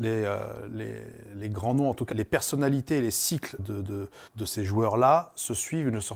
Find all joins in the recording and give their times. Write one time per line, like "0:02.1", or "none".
0:02.1
0:03.6
0:04.3